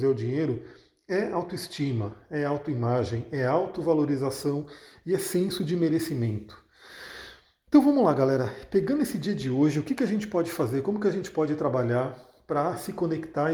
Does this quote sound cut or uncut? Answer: uncut